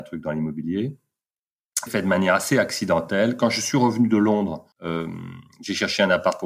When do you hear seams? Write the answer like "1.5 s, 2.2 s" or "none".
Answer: 1.9 s, 4.7 s